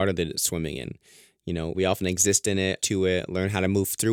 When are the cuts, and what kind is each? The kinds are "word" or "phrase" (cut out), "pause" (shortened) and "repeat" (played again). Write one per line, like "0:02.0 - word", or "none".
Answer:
0:01.7 - word
0:02.8 - word